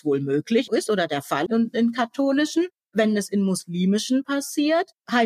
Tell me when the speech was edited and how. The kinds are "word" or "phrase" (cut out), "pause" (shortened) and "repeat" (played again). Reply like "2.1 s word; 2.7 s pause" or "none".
1.5 s word